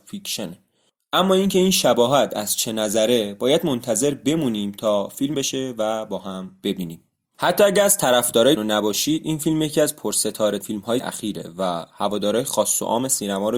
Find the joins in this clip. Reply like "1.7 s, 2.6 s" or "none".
5.3 s, 8.6 s, 10.6 s, 11.0 s